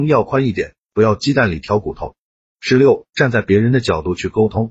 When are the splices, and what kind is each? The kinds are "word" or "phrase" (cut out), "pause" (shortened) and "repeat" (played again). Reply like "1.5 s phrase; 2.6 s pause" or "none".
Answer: none

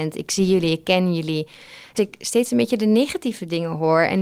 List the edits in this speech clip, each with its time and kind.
2.0 s word

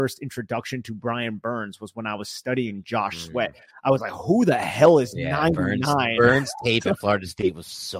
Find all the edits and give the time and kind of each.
none

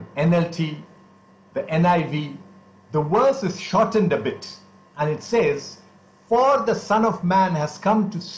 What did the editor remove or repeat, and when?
none

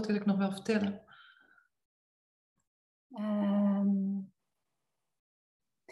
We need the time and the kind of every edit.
none

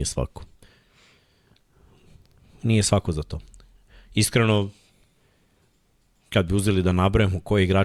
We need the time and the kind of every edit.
none

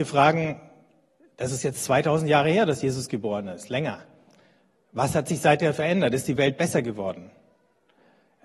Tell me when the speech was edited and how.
none

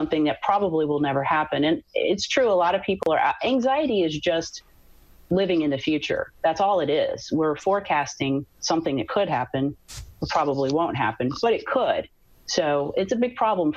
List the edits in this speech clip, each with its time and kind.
none

